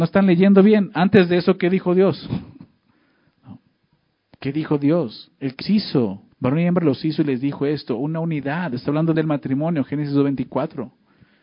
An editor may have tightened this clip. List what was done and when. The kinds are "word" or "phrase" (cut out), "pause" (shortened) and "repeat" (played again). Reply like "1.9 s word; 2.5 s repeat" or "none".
3.9 s pause; 5.6 s word; 6.3 s pause; 9.1 s phrase